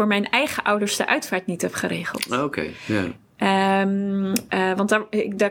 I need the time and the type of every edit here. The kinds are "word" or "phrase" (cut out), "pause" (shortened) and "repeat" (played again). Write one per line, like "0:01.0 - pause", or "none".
none